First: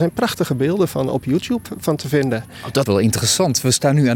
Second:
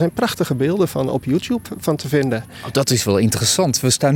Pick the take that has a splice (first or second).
first